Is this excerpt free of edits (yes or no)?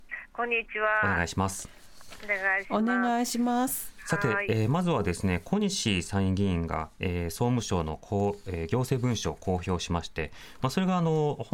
yes